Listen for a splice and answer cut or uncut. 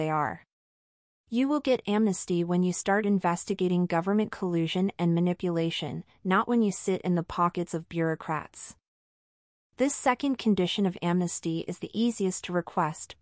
uncut